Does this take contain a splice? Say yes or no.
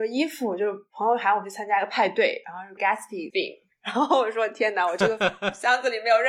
yes